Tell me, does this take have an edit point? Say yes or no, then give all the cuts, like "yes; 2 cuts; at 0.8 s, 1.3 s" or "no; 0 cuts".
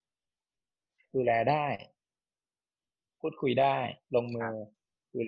yes; 1 cut; at 4.0 s